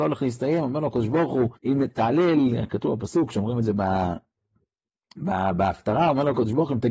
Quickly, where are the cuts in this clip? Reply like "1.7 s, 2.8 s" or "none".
1.6 s